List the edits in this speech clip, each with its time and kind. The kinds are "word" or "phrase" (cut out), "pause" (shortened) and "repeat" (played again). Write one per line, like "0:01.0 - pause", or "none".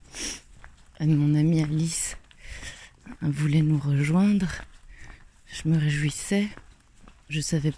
none